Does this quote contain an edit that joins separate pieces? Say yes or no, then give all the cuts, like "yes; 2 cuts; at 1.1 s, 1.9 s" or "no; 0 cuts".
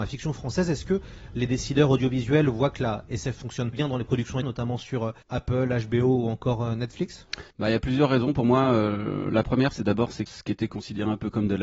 yes; 5 cuts; at 3.7 s, 4.4 s, 5.2 s, 7.5 s, 10.3 s